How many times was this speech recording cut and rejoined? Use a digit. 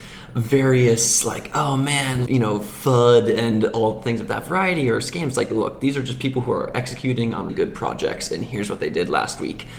2